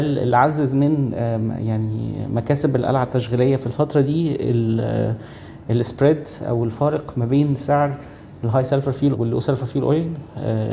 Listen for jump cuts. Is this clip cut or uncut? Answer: cut